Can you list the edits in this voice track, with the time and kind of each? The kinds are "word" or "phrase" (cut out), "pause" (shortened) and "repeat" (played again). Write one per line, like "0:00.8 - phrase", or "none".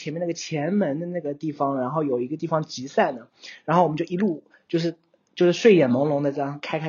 none